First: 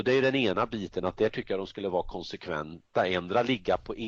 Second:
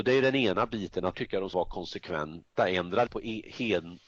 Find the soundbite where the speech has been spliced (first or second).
second